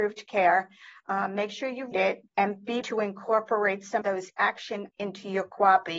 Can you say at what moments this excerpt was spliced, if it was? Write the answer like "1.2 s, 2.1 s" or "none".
1.9 s, 2.3 s, 2.8 s, 4.0 s, 4.9 s